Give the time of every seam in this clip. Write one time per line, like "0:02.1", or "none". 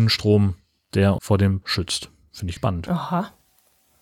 0:01.2
0:01.6
0:02.6